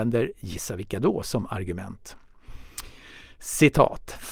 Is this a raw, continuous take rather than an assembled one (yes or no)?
yes